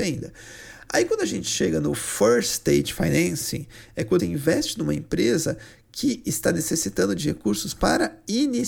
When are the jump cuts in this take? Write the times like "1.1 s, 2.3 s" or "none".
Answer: 4.2 s